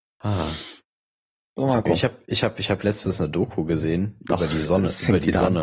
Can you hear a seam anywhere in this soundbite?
no; 0 cuts

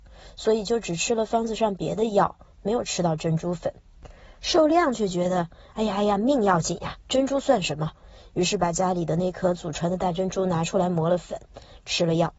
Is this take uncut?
yes; 0 cuts

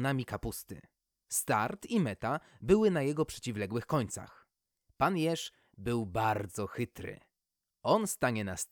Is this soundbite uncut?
yes; 0 cuts

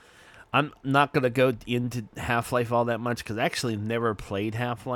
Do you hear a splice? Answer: no; 0 cuts

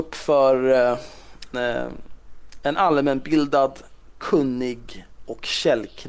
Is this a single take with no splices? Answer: no; 1 cut; at 1.5 s

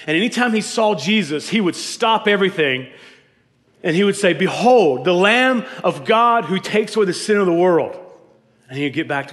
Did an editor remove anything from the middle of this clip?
no; 0 cuts

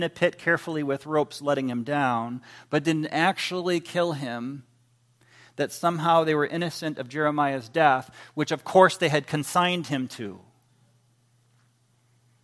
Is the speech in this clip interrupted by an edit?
no; 0 cuts

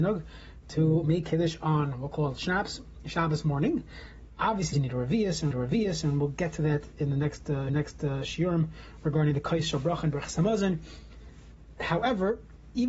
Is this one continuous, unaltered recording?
no; 3 cuts; at 4.7 s, 5.5 s, 7.7 s

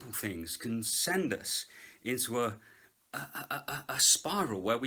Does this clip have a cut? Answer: no; 0 cuts

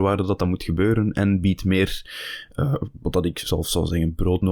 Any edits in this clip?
no; 0 cuts

